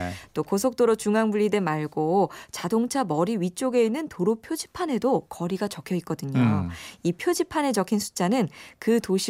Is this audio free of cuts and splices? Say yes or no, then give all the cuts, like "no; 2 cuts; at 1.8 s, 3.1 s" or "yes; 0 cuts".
yes; 0 cuts